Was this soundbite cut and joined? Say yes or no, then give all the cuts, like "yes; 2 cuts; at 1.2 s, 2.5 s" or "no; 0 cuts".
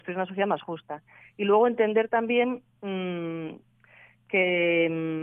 no; 0 cuts